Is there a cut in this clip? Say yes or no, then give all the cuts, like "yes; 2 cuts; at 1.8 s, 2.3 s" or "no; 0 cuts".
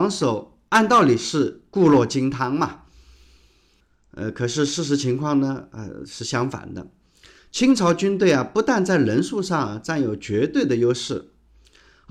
no; 0 cuts